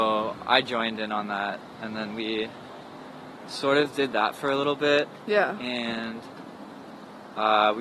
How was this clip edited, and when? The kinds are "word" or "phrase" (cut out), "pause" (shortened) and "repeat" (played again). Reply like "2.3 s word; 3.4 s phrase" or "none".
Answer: none